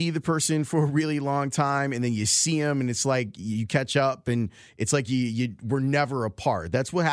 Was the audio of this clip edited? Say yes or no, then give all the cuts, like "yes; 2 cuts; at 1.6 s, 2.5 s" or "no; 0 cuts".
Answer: no; 0 cuts